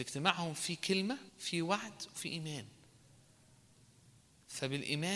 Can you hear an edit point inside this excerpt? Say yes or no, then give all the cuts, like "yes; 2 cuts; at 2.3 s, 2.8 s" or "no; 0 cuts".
yes; 1 cut; at 1.3 s